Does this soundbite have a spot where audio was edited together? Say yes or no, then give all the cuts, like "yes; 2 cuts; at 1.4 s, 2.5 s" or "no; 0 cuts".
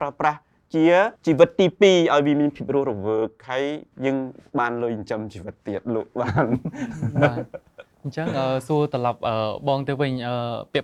yes; 3 cuts; at 1.2 s, 3.9 s, 7.9 s